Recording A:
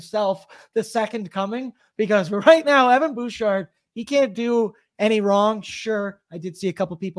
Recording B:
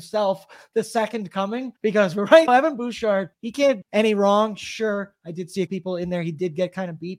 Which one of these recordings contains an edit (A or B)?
B